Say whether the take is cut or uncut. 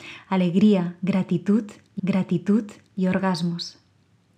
cut